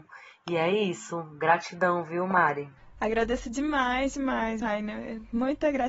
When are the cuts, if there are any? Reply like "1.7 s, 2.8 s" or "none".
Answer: 4.6 s